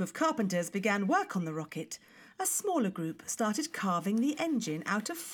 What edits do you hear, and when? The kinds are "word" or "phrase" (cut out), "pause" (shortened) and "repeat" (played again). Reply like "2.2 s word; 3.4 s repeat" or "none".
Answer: none